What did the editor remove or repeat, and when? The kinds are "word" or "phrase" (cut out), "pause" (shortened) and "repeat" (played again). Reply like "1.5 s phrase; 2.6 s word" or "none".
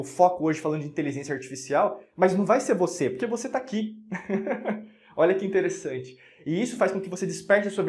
none